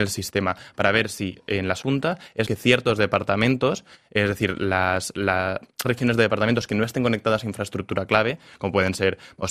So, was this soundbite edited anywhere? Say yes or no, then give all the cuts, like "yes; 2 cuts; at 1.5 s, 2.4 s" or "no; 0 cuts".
yes; 3 cuts; at 1.8 s, 2.5 s, 5.8 s